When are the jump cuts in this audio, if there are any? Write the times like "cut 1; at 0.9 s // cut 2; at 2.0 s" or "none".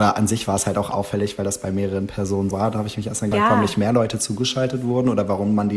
cut 1; at 2.5 s // cut 2; at 3.3 s